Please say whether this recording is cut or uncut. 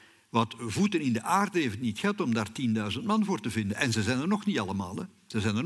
uncut